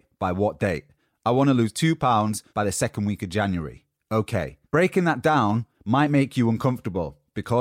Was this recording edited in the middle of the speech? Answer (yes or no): yes